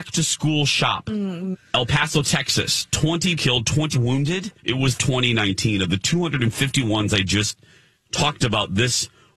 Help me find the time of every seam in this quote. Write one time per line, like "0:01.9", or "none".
0:01.5
0:03.4
0:03.9
0:04.6
0:05.0